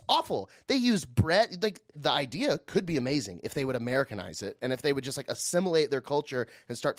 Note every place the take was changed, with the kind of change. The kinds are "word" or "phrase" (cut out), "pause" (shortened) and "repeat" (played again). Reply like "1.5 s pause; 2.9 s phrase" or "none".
1.9 s word

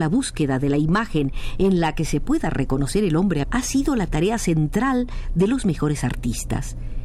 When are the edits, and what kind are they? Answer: 3.4 s word

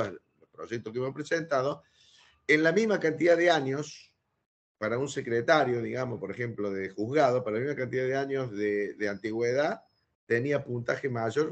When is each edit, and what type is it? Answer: none

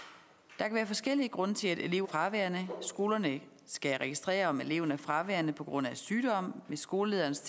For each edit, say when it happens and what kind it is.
2.0 s word

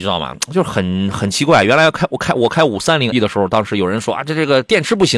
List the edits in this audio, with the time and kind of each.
3.1 s word

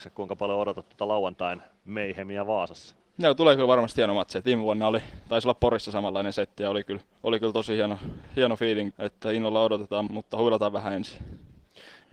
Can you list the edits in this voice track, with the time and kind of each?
3.0 s pause; 7.1 s pause; 8.9 s word; 10.1 s word

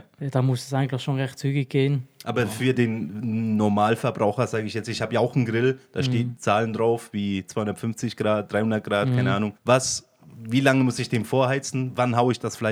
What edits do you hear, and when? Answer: 9.6 s pause

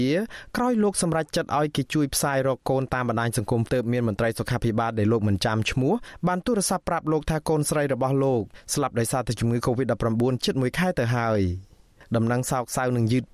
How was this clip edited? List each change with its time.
3.7 s word

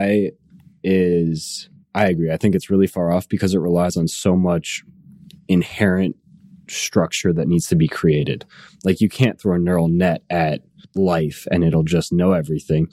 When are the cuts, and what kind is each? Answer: none

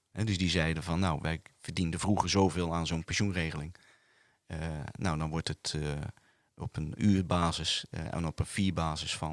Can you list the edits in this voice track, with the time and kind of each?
none

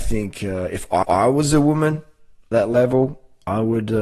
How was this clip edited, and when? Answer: 1.0 s repeat; 2.5 s word

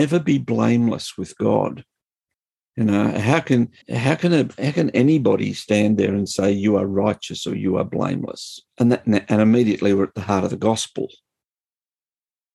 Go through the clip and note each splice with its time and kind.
2.3 s pause; 3.8 s pause; 8.7 s pause

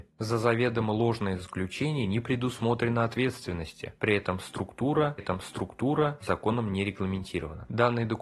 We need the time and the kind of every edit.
5.2 s repeat

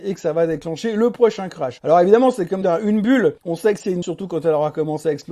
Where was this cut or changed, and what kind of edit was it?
2.6 s word; 3.4 s pause; 4.0 s word

